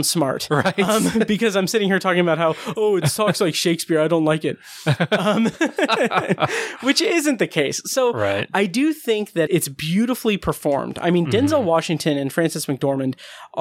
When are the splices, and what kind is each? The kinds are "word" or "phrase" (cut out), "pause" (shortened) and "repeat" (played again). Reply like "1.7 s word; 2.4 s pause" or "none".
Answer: 9.5 s word